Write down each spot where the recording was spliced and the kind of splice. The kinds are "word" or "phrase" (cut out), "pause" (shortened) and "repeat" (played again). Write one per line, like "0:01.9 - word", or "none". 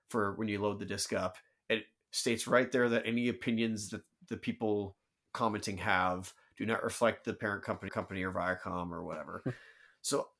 0:07.9 - repeat